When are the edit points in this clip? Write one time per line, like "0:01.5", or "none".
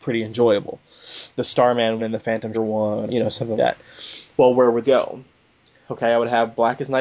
0:01.3
0:02.0
0:02.5
0:03.1
0:03.6
0:04.8